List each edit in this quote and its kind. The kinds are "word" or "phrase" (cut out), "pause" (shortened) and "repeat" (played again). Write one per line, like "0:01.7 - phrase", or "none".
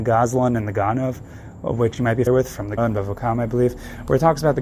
0:02.3 - word
0:02.8 - word